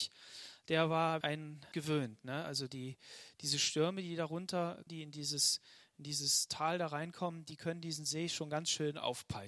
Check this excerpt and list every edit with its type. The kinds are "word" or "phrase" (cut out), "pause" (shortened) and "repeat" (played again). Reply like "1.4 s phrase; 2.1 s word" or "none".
1.2 s word; 1.7 s word; 4.9 s word